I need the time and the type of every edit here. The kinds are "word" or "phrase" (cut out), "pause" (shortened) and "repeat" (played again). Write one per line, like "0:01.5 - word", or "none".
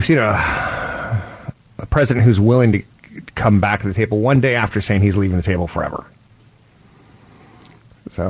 none